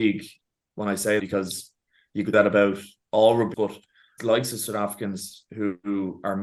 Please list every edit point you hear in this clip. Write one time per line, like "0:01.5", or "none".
0:01.2
0:02.3
0:03.5
0:04.2